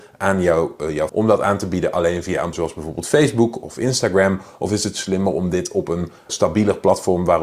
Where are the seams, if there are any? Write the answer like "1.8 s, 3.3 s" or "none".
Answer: 1.1 s, 2.5 s, 6.3 s